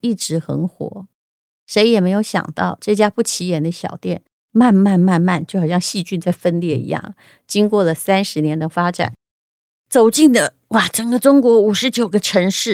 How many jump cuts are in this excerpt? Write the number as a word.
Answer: zero